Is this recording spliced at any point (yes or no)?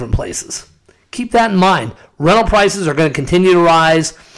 no